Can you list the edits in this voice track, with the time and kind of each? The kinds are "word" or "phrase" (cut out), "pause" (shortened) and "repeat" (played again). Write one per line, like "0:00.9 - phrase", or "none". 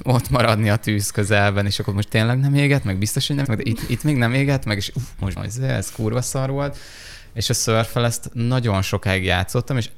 0:03.4 - word
0:05.4 - word